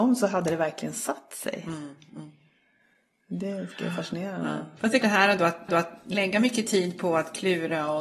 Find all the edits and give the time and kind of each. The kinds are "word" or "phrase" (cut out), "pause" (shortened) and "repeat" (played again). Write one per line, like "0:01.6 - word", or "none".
0:05.0 - word
0:05.7 - repeat

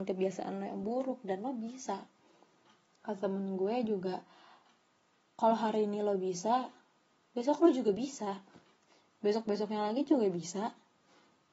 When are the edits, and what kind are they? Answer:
none

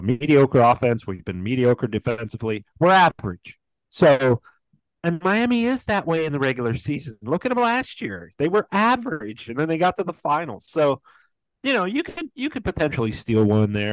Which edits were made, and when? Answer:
none

